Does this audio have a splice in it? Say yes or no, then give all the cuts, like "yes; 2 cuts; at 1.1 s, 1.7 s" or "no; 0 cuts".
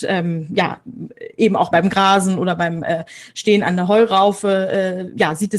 yes; 1 cut; at 1.7 s